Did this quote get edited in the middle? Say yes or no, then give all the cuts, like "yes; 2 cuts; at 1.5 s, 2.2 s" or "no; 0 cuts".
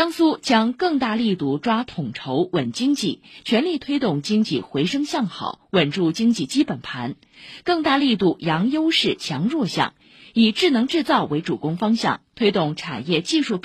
no; 0 cuts